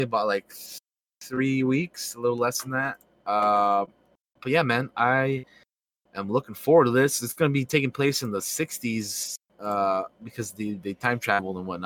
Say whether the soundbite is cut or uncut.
uncut